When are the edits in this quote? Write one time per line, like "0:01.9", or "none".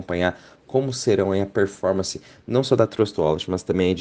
none